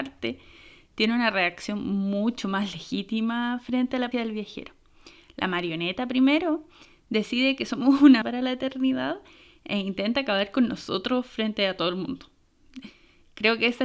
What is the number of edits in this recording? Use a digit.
2